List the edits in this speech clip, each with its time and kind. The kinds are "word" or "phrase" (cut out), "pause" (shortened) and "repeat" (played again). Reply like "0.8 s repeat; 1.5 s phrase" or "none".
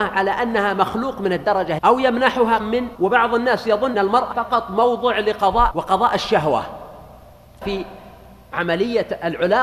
1.8 s word; 2.6 s word; 2.9 s word; 3.9 s word; 4.3 s word; 5.7 s word; 7.6 s word